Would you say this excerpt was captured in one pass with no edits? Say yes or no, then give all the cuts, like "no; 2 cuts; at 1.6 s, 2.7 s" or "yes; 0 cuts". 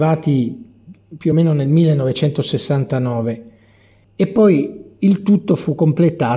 yes; 0 cuts